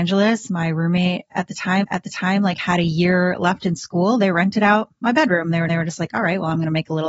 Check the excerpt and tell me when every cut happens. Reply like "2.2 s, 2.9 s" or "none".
1.8 s, 5.7 s

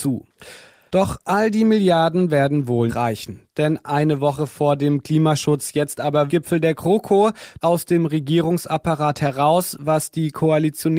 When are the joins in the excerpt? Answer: 2.9 s, 6.3 s, 7.6 s

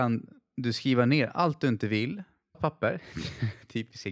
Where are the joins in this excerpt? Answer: 2.5 s

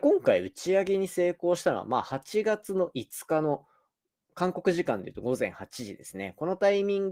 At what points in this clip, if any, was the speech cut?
none

